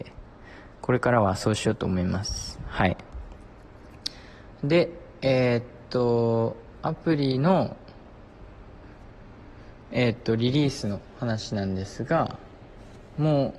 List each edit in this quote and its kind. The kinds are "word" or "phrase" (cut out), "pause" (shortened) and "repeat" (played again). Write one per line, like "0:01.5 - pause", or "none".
0:09.8 - pause